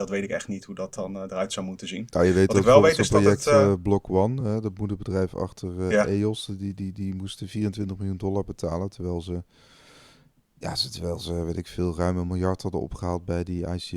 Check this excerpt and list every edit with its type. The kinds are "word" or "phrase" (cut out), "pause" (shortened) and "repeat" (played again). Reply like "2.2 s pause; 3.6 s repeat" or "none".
none